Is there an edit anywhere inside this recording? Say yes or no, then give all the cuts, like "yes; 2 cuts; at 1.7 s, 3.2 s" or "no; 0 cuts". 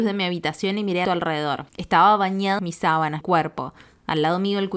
yes; 4 cuts; at 1.0 s, 1.7 s, 2.6 s, 3.2 s